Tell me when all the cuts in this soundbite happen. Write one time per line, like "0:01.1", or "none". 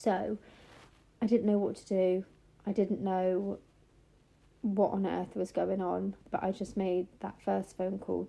0:06.2